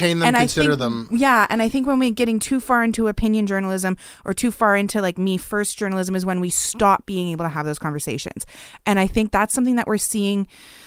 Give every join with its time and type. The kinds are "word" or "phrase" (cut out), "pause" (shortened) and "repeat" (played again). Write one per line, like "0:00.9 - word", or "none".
none